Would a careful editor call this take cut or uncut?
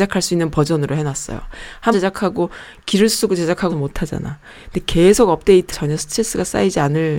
cut